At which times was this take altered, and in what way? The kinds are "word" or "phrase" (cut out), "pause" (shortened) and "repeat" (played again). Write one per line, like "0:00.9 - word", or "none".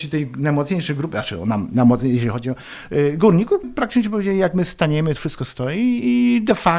0:03.6 - word